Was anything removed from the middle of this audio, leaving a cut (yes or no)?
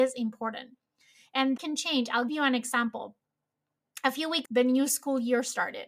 yes